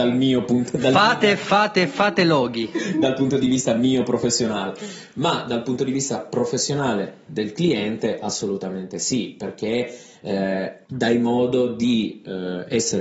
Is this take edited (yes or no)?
yes